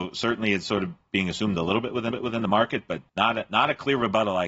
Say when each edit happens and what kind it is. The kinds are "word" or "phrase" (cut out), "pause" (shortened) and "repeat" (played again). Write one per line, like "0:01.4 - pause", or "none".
0:02.1 - repeat
0:03.1 - pause